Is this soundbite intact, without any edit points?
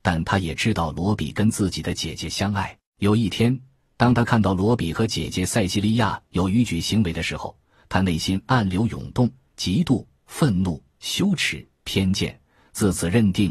no; 1 cut; at 2.9 s

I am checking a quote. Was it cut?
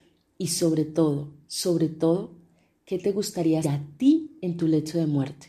yes; 1 cut; at 3.6 s

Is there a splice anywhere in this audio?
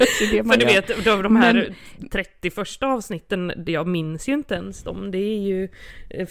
no; 0 cuts

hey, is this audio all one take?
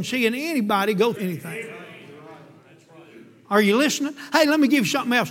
no; 1 cut; at 1.2 s

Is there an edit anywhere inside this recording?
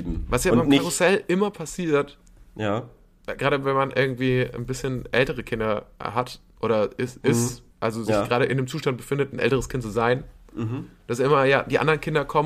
yes; 2 cuts; at 6.5 s, 7.7 s

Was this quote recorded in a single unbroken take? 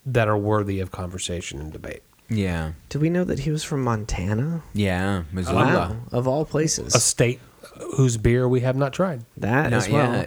no; 1 cut; at 9.3 s

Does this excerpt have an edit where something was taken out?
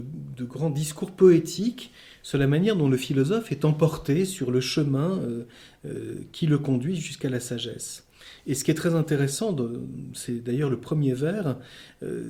no; 0 cuts

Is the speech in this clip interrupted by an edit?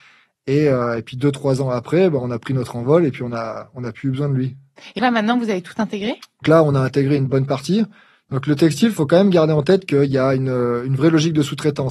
yes; 2 cuts; at 5.0 s, 6.4 s

